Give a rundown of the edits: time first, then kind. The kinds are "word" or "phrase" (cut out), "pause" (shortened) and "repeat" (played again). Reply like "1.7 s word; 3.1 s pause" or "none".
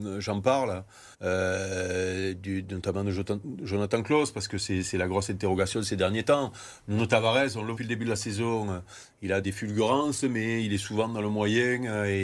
1.1 s pause; 7.8 s phrase; 9.4 s word